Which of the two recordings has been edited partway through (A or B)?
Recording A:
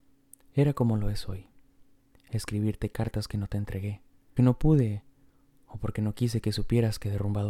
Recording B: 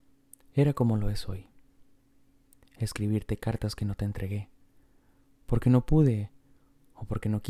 A